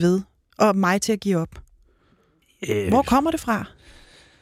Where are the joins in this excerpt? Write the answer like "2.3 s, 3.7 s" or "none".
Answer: none

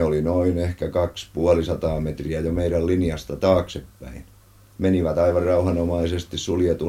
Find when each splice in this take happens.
none

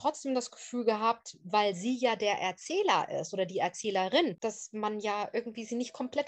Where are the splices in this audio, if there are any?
none

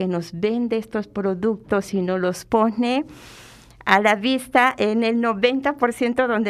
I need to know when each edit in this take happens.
none

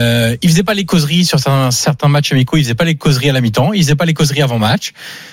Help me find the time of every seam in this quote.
none

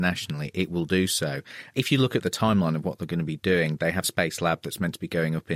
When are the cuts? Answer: 4.0 s

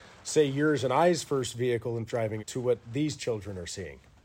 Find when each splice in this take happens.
2.1 s, 2.4 s

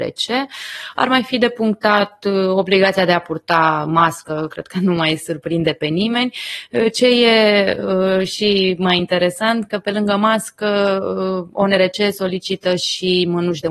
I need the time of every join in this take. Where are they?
none

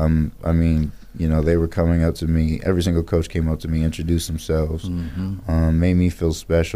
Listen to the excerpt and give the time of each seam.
none

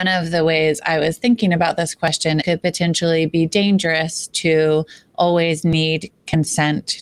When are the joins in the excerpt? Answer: 2.4 s

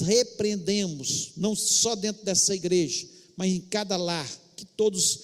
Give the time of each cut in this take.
none

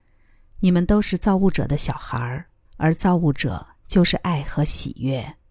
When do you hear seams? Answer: 2.6 s

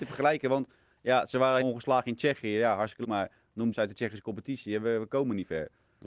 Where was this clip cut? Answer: 1.6 s, 3.0 s, 3.7 s

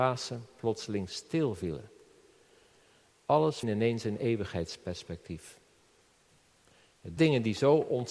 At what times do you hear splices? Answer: 3.6 s, 7.2 s

